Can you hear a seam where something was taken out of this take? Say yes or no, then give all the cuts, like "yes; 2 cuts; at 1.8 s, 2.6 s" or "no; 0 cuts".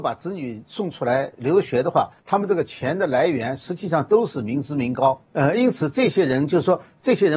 yes; 2 cuts; at 2.2 s, 5.2 s